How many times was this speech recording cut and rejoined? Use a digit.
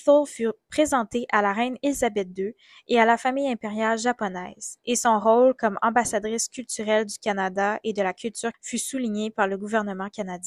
1